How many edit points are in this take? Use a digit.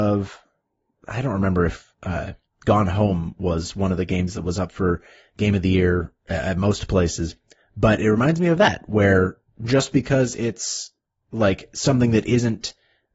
0